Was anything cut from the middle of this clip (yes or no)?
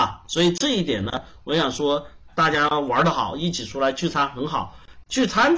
yes